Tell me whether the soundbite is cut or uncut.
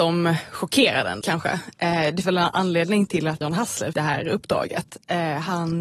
cut